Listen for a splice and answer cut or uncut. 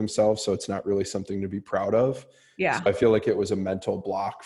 uncut